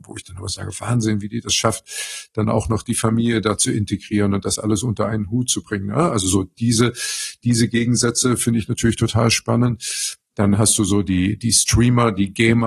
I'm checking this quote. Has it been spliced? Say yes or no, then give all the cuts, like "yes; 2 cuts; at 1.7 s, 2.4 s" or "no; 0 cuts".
no; 0 cuts